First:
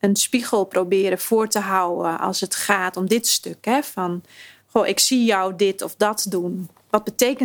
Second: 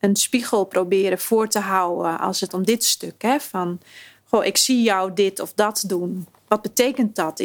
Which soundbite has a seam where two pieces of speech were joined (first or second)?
second